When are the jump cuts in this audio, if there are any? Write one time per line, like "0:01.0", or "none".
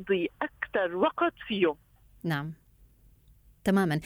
none